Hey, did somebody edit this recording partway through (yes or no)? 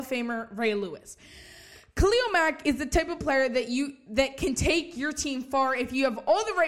no